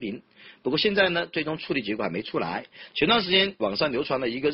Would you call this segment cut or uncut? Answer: cut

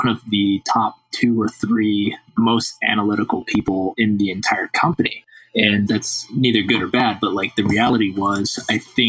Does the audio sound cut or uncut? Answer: uncut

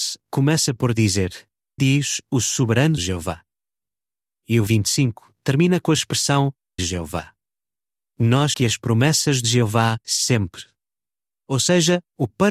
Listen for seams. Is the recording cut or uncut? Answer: cut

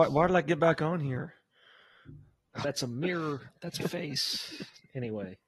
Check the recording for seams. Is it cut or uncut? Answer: cut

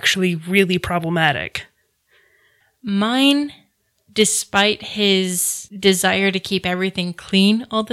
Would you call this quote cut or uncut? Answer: uncut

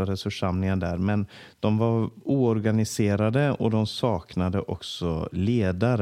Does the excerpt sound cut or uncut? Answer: uncut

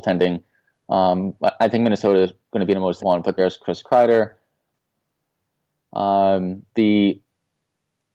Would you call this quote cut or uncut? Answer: cut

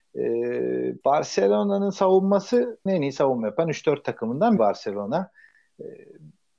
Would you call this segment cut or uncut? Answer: cut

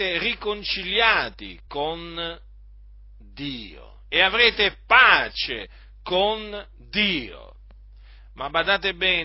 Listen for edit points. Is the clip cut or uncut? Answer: uncut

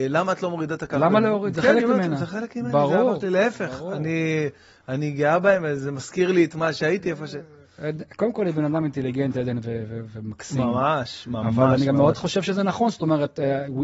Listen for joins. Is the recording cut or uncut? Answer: uncut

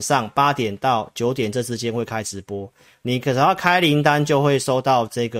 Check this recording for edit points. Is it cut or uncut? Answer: uncut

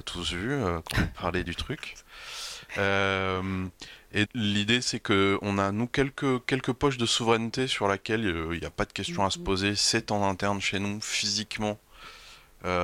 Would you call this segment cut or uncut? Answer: cut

